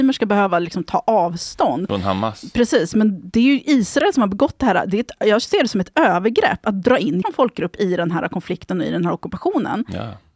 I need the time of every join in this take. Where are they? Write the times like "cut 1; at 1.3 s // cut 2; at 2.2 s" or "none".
cut 1; at 7.2 s

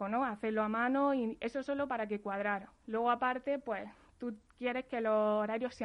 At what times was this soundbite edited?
none

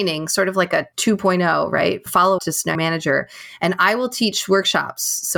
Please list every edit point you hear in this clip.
cut 1; at 2.4 s // cut 2; at 2.7 s

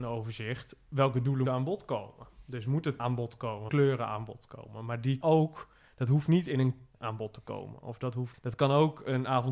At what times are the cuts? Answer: cut 1; at 1.5 s // cut 2; at 3.0 s // cut 3; at 3.7 s // cut 4; at 5.2 s // cut 5; at 6.9 s // cut 6; at 8.3 s

